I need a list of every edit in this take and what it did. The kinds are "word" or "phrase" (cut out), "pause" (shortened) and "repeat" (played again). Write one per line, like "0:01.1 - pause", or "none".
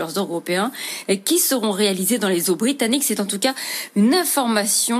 none